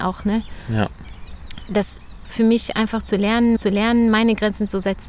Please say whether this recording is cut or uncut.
cut